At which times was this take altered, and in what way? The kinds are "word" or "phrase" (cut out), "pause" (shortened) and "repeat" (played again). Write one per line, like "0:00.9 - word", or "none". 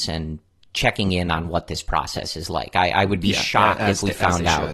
none